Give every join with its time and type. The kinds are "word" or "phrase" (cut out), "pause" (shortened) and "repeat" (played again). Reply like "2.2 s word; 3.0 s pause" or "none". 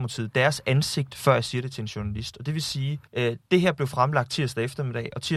3.1 s pause